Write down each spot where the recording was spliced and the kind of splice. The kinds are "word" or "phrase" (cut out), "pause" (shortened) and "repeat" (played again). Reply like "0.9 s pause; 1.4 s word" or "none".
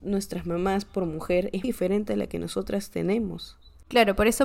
1.6 s word